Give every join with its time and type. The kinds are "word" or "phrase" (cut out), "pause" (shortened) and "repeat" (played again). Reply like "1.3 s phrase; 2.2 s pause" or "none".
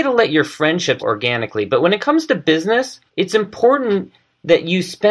1.0 s word; 3.1 s pause

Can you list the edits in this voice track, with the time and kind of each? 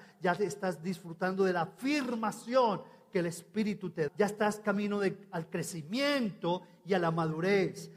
4.1 s word

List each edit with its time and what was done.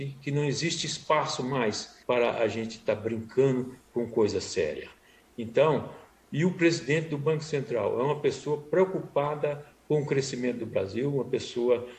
2.0 s pause

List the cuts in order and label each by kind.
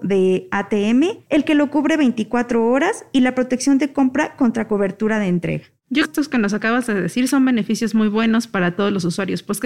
6.0 s phrase

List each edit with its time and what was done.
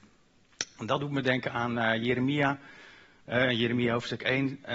none

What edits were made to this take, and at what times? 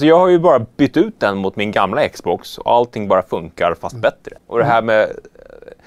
4.4 s pause

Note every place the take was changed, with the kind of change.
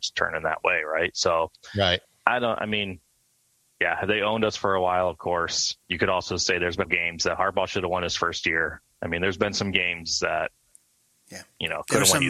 2.0 s pause; 5.8 s pause; 6.8 s phrase

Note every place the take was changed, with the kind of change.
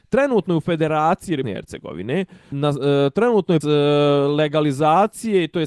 1.4 s word; 2.5 s word; 3.6 s word

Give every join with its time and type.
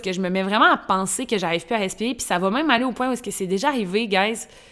none

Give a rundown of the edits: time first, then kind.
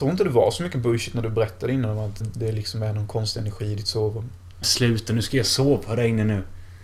2.2 s word; 4.6 s word

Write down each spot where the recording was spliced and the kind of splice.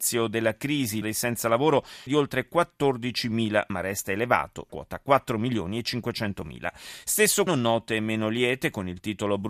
1.0 s word; 2.1 s word; 3.7 s word; 4.7 s word; 7.5 s word

